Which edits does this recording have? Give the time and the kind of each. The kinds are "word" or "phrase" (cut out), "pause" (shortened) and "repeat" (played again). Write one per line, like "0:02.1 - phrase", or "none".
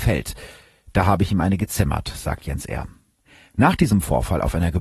none